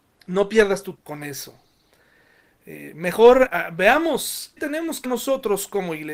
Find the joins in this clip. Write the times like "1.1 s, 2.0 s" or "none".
0.9 s, 3.5 s, 4.6 s, 5.0 s

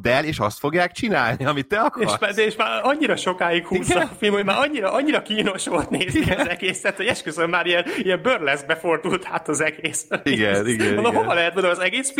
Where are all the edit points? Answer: none

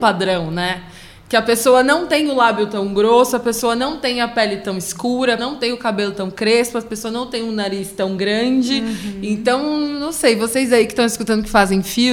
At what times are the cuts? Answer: 5.4 s

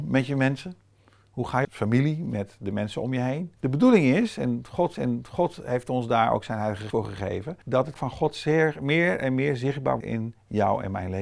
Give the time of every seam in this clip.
1.6 s, 3.6 s, 5.0 s, 6.9 s, 7.6 s, 8.0 s, 10.0 s

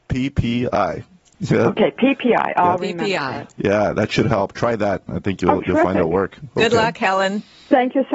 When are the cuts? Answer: none

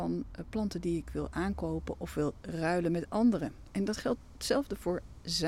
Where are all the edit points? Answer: none

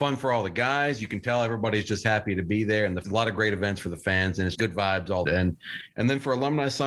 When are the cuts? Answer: 3.0 s, 4.5 s, 5.2 s

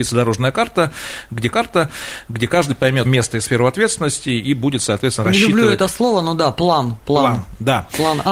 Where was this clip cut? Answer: 1.5 s, 3.0 s

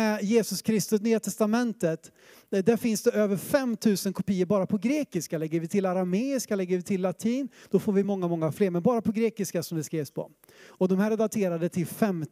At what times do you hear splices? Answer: none

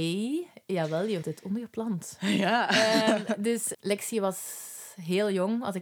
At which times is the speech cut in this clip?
1.2 s, 3.7 s

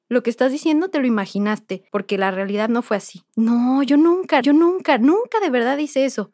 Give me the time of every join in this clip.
1.9 s, 3.3 s, 4.4 s

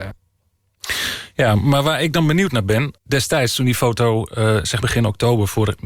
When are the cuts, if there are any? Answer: 3.0 s, 4.8 s

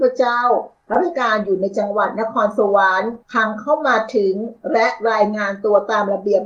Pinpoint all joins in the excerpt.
3.2 s

